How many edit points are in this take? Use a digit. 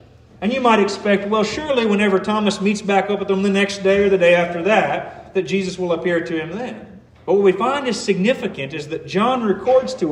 1